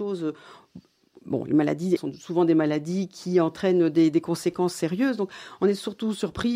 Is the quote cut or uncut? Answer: cut